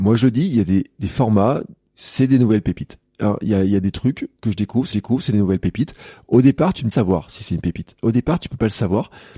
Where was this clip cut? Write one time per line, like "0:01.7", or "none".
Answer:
0:04.9
0:06.9